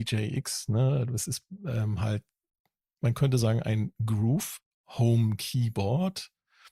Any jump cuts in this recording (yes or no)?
no